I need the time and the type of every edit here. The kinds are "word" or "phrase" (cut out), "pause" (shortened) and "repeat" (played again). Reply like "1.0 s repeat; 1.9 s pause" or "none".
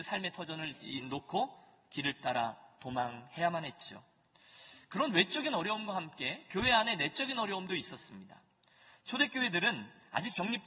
none